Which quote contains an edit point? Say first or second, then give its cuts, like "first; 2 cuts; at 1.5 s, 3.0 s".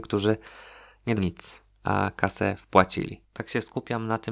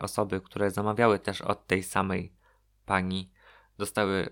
first; 1 cut; at 1.2 s